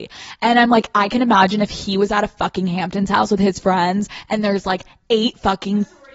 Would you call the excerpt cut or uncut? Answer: uncut